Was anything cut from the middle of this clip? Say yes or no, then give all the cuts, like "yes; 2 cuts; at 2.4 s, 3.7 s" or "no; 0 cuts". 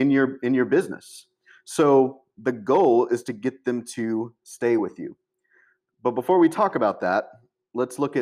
no; 0 cuts